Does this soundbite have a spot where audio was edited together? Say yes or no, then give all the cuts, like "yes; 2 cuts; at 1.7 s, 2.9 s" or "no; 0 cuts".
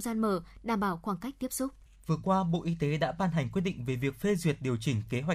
yes; 1 cut; at 1.9 s